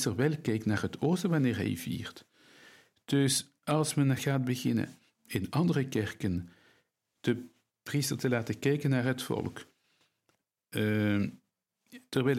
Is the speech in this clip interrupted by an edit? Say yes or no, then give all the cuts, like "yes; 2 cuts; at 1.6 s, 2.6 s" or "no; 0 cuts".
no; 0 cuts